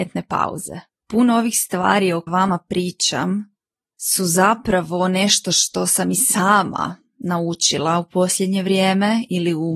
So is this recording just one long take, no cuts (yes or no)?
no